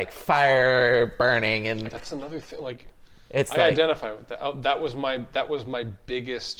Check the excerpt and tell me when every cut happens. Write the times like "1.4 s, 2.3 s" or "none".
1.9 s